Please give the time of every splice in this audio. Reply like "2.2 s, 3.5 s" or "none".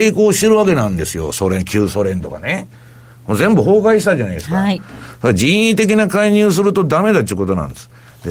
none